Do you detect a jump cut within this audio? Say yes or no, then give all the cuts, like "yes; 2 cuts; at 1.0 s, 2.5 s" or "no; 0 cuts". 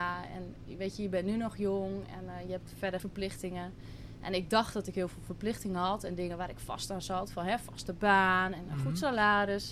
yes; 1 cut; at 3.0 s